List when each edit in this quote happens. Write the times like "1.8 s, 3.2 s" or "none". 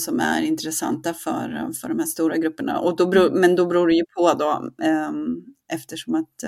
none